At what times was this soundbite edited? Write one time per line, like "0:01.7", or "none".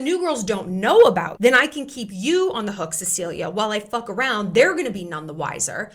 0:01.4

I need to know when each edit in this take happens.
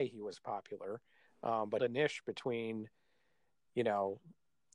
0:01.8

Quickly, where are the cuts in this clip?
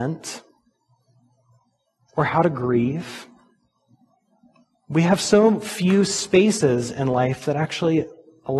none

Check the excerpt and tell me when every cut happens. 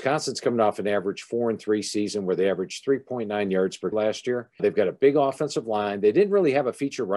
0:03.9
0:04.6

